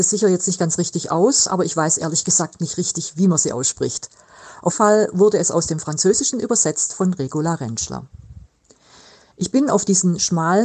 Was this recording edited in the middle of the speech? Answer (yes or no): yes